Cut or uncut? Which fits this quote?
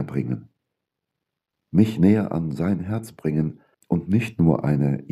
cut